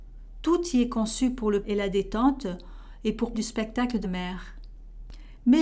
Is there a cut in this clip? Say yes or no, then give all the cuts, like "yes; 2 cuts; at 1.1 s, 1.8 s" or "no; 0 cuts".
yes; 3 cuts; at 1.6 s, 3.3 s, 4.0 s